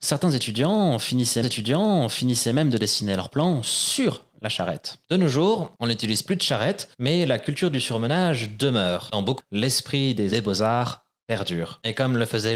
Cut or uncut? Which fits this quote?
cut